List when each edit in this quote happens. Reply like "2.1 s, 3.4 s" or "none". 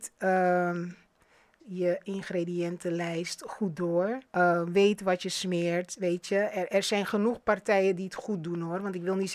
1.6 s, 4.3 s